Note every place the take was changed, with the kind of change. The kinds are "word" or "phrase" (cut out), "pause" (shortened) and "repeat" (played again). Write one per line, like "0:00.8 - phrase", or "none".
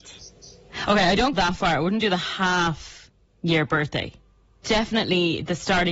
0:01.3 - word
0:04.6 - word

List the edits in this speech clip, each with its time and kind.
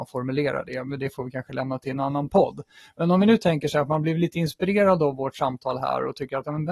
none

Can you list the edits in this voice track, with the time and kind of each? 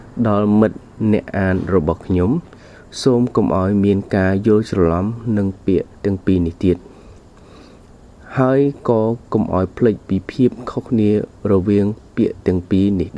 0:05.9 - pause

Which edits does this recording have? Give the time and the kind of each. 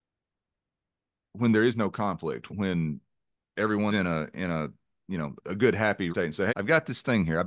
0:02.5 - word
0:03.9 - word
0:05.4 - word
0:06.1 - word
0:06.5 - word

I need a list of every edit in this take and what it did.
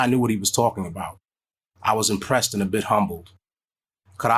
none

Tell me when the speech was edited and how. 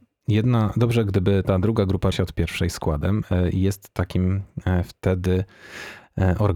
0:02.1 - word

